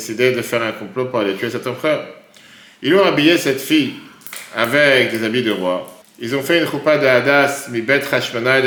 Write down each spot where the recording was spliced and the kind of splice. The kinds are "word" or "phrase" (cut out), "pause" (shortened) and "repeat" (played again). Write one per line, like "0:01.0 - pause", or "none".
0:06.0 - pause